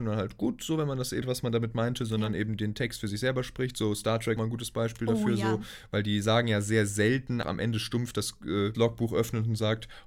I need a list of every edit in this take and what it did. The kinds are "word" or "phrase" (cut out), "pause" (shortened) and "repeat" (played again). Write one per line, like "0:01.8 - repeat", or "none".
0:01.2 - phrase
0:04.4 - phrase
0:07.4 - word
0:08.7 - phrase